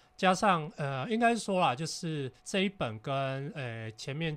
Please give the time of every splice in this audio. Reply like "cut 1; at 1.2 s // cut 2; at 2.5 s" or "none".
cut 1; at 2.4 s